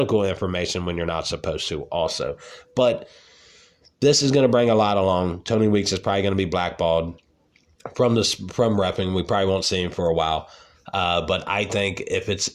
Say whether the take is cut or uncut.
uncut